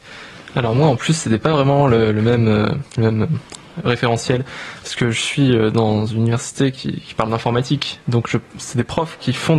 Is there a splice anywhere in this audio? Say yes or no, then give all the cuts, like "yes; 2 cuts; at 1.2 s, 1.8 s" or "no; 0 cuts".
no; 0 cuts